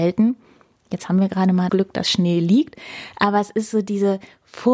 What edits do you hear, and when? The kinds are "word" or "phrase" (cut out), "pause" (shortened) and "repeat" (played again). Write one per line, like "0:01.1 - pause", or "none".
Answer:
0:01.7 - word